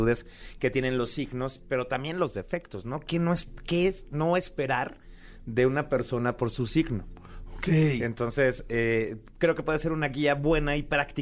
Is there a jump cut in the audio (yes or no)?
no